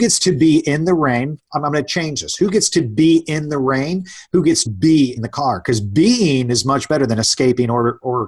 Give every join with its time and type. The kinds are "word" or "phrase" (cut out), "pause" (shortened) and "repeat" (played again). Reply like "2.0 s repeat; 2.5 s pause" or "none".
4.7 s word; 5.2 s word